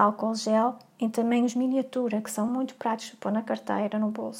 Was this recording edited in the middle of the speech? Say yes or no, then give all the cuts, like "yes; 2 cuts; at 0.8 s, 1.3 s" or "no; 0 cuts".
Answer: no; 0 cuts